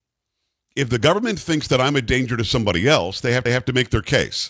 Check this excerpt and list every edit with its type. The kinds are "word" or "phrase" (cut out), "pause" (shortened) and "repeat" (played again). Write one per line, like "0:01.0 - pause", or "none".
0:03.5 - repeat